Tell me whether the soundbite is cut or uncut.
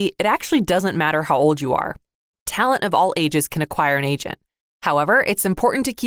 uncut